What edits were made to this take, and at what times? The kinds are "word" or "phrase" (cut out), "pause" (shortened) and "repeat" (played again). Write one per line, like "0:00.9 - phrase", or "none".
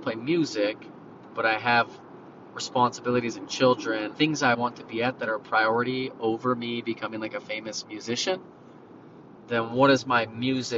0:04.1 - word
0:04.5 - word